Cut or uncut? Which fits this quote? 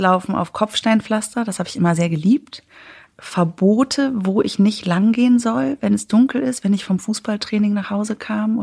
uncut